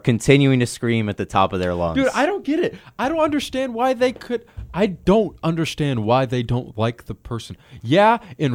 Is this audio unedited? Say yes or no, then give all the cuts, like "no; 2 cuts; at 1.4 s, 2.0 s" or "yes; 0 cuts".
yes; 0 cuts